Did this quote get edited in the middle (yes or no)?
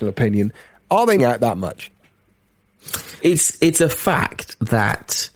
yes